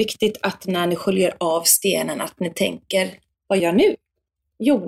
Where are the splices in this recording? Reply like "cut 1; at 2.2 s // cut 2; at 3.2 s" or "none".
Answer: cut 1; at 3.6 s